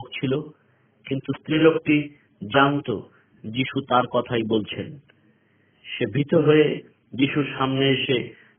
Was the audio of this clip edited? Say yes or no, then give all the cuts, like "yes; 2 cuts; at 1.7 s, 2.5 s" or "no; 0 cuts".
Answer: no; 0 cuts